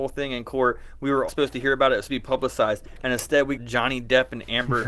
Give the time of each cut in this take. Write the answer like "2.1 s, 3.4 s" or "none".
1.3 s, 2.1 s, 3.6 s